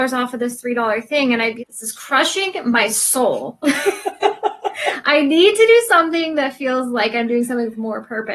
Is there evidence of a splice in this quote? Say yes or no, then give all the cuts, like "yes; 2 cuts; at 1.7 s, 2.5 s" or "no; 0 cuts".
yes; 1 cut; at 1.6 s